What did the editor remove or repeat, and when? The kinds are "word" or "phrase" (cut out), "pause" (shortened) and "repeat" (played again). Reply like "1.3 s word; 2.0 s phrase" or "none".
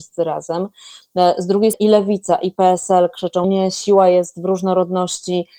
1.7 s word; 3.4 s word